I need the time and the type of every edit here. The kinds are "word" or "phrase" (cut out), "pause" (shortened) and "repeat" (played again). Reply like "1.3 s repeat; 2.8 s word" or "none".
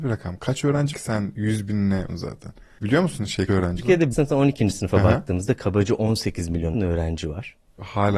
0.9 s word; 2.1 s word; 3.5 s word; 3.8 s word; 4.1 s word; 6.7 s word